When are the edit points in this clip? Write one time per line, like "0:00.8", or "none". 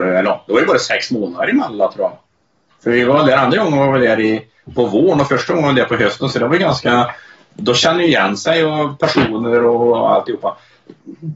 none